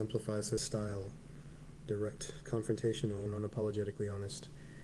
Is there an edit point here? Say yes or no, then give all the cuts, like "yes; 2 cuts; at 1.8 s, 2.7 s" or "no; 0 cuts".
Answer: no; 0 cuts